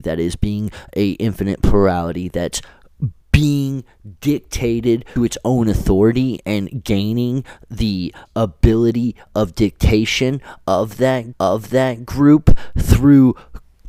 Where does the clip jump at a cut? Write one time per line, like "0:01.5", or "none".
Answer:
0:03.2
0:05.2
0:08.3
0:11.3